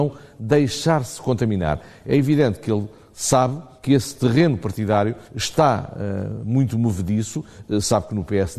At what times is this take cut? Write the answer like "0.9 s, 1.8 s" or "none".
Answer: 3.8 s, 5.3 s